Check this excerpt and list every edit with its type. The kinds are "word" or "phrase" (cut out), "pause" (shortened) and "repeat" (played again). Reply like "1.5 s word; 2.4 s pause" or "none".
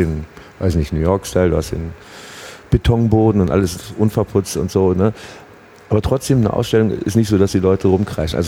none